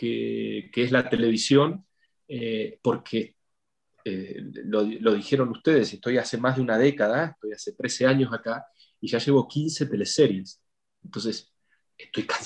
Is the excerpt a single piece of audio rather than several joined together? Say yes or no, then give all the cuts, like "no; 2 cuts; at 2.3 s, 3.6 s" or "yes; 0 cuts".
yes; 0 cuts